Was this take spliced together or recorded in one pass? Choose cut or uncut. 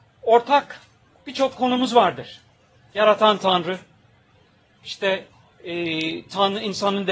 uncut